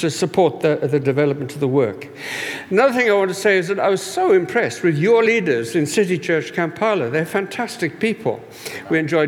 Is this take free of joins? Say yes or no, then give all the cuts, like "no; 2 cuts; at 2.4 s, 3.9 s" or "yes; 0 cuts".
yes; 0 cuts